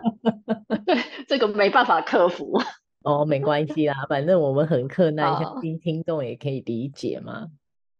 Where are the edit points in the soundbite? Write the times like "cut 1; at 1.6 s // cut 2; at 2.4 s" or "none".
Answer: none